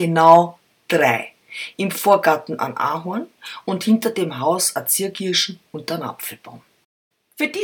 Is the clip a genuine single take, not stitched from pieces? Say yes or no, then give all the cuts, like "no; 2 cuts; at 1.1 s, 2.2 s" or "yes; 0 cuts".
yes; 0 cuts